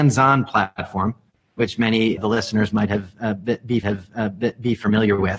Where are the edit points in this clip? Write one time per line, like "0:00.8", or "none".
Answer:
0:02.2
0:03.8

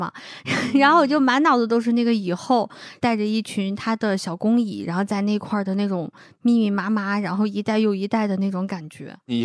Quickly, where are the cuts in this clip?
none

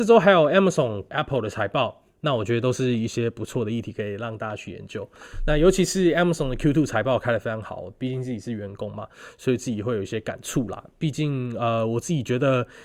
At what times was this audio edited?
0:01.1

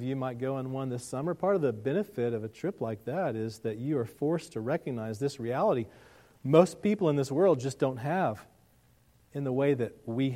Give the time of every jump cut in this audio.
none

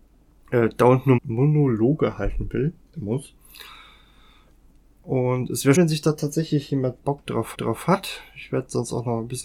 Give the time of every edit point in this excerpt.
0:01.2
0:02.8
0:05.7
0:07.0
0:07.5

